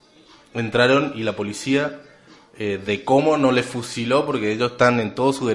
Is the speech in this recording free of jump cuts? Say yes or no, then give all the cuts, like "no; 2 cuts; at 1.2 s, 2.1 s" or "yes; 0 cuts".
yes; 0 cuts